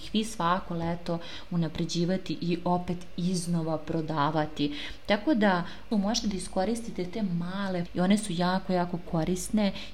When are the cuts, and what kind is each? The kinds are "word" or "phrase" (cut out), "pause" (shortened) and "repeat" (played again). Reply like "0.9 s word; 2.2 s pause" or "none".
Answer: 5.9 s phrase; 7.9 s word

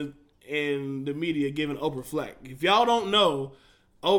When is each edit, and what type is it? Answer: none

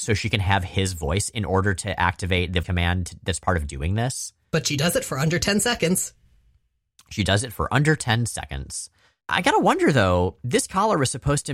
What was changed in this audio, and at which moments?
1.3 s word; 2.6 s word

